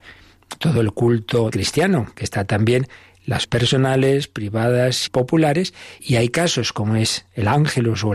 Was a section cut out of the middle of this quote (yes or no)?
yes